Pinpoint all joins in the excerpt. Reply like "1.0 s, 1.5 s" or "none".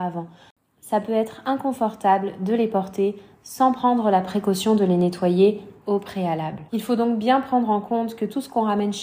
6.7 s